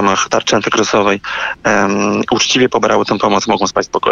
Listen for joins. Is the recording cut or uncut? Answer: uncut